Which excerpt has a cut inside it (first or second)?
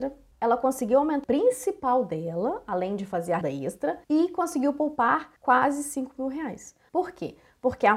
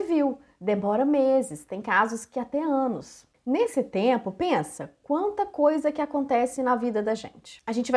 first